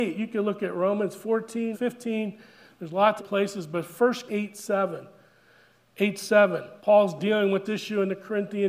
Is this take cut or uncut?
cut